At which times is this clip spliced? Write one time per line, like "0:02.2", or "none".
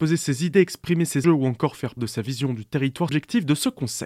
0:01.2
0:02.0
0:03.1